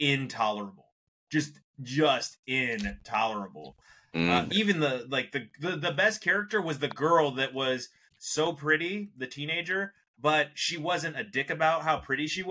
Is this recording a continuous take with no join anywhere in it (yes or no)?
yes